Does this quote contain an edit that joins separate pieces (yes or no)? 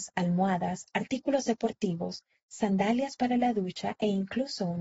no